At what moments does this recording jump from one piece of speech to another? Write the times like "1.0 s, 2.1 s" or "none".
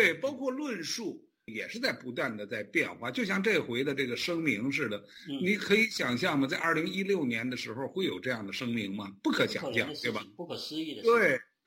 none